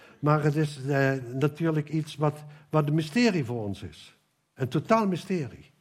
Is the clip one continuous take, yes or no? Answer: yes